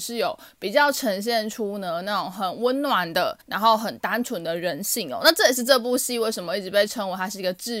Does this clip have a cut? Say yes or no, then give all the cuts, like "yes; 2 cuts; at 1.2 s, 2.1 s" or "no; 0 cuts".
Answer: yes; 1 cut; at 3.4 s